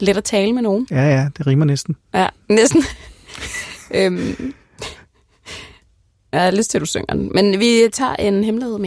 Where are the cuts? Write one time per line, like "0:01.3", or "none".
none